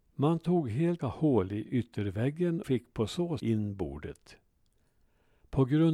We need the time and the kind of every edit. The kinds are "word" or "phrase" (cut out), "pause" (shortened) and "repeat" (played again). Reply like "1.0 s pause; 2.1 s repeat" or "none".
1.0 s word; 2.6 s word; 3.4 s word